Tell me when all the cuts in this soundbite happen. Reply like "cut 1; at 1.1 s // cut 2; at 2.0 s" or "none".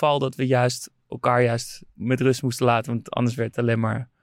cut 1; at 1.9 s